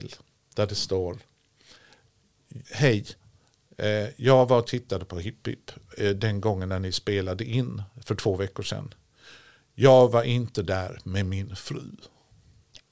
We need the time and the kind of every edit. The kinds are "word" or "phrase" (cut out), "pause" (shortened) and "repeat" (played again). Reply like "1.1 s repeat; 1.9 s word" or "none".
2.6 s pause